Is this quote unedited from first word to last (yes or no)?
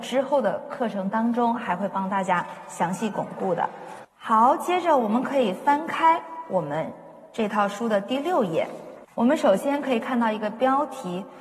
no